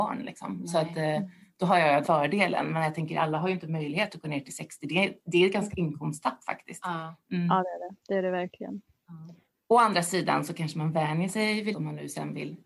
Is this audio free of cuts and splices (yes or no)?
no